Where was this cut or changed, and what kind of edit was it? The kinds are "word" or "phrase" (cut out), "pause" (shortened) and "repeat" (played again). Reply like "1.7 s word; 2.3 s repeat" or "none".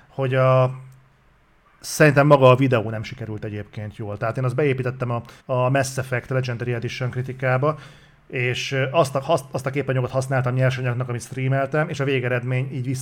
5.4 s pause